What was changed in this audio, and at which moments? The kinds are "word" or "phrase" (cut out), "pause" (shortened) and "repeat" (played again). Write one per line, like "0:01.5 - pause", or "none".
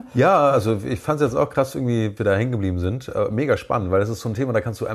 0:02.2 - word